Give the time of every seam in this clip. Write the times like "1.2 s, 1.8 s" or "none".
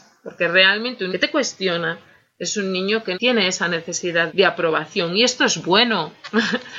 1.1 s, 3.1 s, 4.3 s